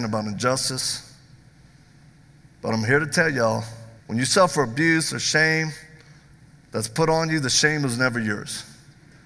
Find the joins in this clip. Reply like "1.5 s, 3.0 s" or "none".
4.0 s

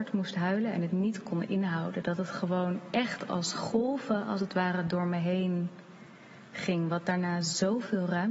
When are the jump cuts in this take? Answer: none

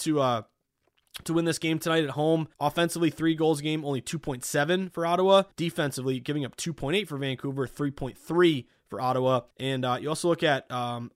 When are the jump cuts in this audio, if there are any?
2.5 s, 5.5 s, 9.5 s

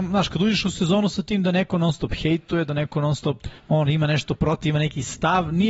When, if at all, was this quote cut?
3.6 s

